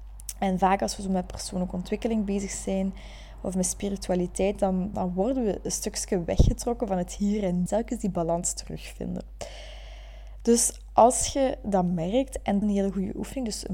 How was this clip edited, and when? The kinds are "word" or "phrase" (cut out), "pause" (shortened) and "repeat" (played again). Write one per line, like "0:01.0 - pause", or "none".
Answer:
0:04.9 - word
0:07.7 - phrase
0:12.6 - phrase